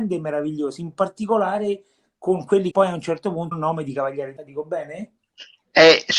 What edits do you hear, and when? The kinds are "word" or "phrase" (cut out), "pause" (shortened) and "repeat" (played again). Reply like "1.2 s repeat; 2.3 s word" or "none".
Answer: 2.7 s word; 3.5 s word; 4.4 s word